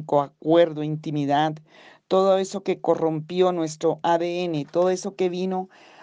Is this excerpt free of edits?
yes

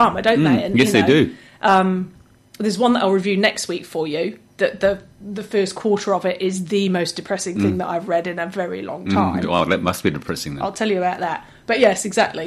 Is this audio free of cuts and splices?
yes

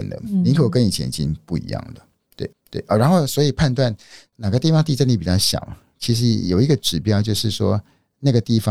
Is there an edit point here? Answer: yes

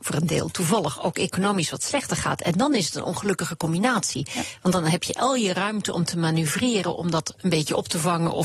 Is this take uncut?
yes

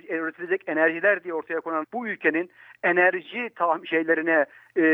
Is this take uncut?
no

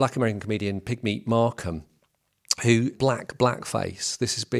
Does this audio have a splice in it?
yes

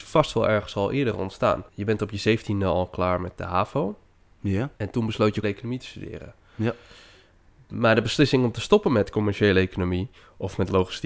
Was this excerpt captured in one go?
no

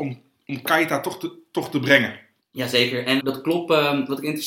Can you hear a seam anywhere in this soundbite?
yes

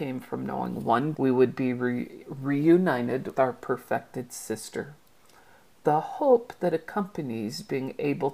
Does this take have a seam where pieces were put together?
yes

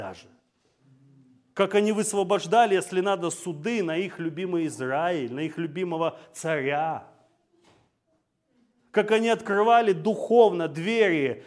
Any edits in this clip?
no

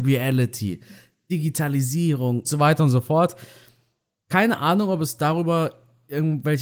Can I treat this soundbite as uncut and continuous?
no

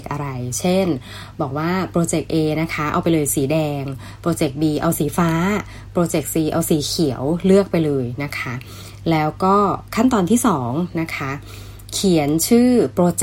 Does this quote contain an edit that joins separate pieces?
no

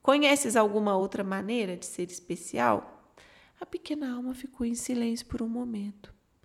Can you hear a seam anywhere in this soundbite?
no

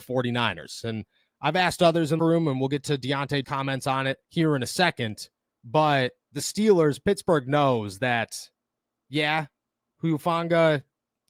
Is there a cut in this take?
yes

